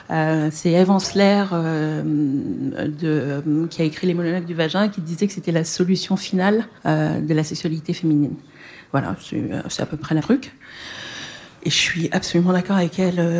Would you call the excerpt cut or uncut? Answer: cut